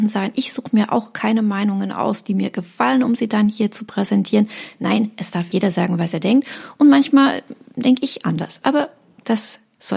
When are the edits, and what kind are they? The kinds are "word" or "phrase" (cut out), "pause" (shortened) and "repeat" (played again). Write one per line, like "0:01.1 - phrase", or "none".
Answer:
0:05.5 - word